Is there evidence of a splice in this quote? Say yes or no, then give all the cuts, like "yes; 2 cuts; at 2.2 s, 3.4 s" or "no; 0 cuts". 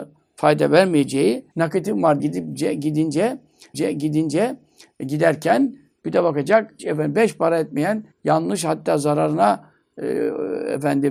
yes; 5 cuts; at 1.5 s, 2.2 s, 3.7 s, 6.8 s, 8.1 s